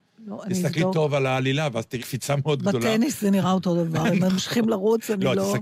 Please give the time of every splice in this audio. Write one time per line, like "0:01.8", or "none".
0:02.0